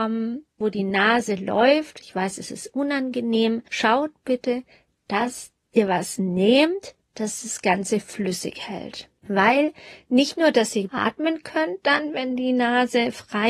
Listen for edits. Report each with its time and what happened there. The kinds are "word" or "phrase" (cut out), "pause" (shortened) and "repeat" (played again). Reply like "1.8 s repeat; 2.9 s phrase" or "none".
3.7 s pause; 10.9 s word

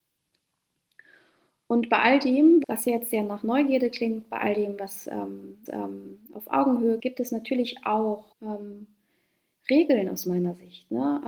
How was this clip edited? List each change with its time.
2.6 s word; 5.7 s repeat; 7.0 s word; 8.3 s pause

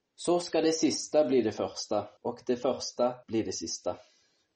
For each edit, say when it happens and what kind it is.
2.2 s pause; 3.2 s pause

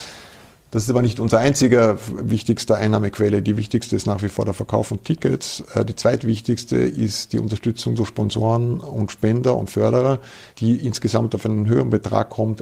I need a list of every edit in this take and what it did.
10.5 s pause

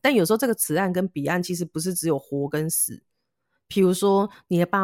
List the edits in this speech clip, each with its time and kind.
none

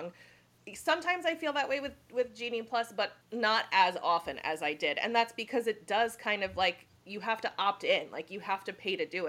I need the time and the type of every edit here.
3.2 s pause

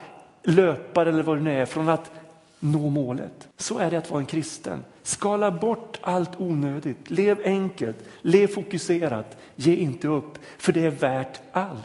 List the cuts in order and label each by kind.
3.5 s pause

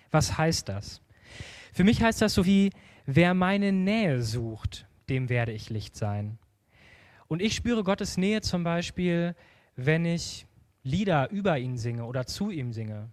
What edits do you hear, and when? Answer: 2.4 s word

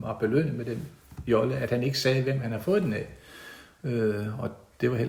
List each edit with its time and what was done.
none

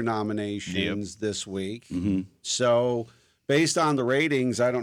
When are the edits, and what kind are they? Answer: none

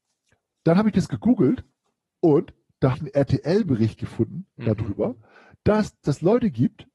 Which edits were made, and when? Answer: 2.9 s word

